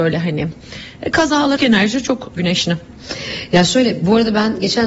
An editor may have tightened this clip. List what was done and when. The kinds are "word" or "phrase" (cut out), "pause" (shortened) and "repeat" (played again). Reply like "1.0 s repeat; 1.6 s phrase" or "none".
1.6 s word; 2.4 s word